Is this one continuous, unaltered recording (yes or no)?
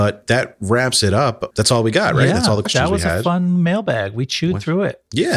yes